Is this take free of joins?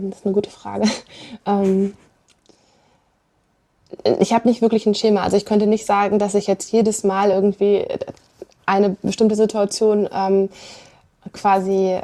yes; 0 cuts

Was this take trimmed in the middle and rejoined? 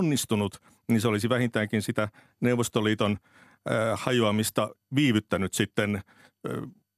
no; 0 cuts

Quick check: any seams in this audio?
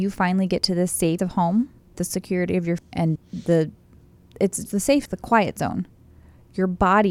yes; 6 cuts; at 1.2 s, 1.9 s, 2.8 s, 3.2 s, 4.7 s, 5.1 s

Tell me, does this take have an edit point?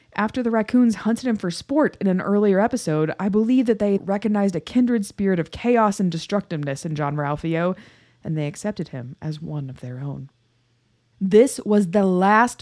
yes; 1 cut; at 4.0 s

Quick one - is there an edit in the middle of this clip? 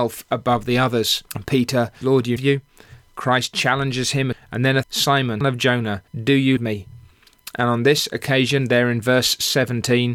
yes; 8 cuts; at 1.3 s, 2.0 s, 2.4 s, 4.3 s, 4.8 s, 5.4 s, 6.1 s, 6.6 s

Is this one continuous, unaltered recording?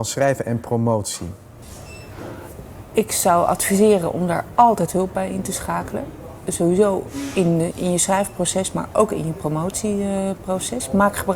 yes; 0 cuts

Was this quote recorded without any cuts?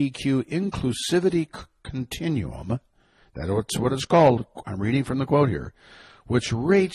yes; 0 cuts

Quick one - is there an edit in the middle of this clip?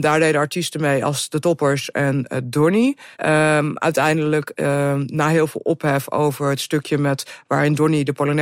yes; 1 cut; at 3.1 s

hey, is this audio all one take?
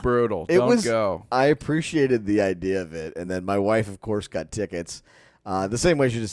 yes; 0 cuts

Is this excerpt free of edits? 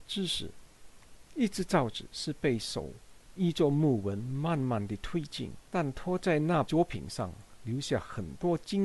no; 1 cut; at 5.7 s

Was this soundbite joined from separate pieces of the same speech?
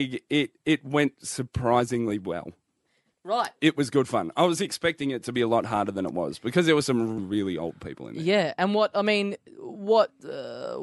yes; 1 cut; at 7.2 s

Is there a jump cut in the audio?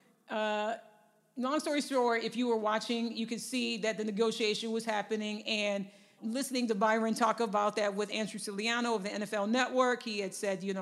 yes; 1 cut; at 6.2 s

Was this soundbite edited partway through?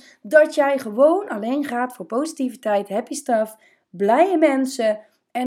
no; 0 cuts

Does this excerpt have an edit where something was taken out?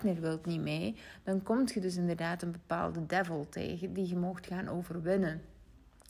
no; 0 cuts

